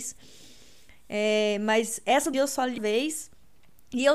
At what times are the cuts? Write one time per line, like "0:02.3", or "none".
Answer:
0:02.3
0:02.8